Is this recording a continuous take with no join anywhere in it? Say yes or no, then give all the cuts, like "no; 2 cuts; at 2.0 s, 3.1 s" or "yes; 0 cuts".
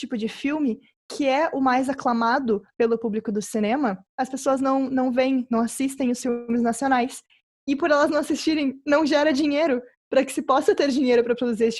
yes; 0 cuts